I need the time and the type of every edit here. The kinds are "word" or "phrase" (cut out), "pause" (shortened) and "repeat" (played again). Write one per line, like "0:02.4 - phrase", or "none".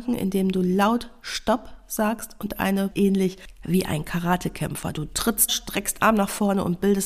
0:02.9 - phrase
0:05.5 - phrase
0:06.0 - word